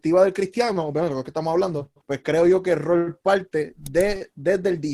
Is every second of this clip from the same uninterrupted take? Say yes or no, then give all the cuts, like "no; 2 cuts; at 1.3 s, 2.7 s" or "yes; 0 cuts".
no; 1 cut; at 2.0 s